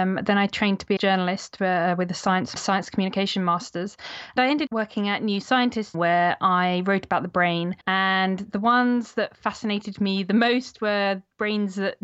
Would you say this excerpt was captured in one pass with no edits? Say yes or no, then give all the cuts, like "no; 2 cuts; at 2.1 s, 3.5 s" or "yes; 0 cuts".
no; 6 cuts; at 1.0 s, 2.6 s, 4.4 s, 4.7 s, 5.9 s, 7.8 s